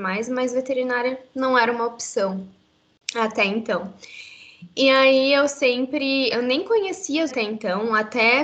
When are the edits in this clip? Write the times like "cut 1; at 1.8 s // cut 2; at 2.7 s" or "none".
cut 1; at 6.3 s // cut 2; at 7.3 s